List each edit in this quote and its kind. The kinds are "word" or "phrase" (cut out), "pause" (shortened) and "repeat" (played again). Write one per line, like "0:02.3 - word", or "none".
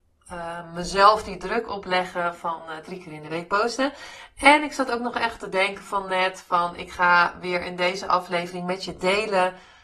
none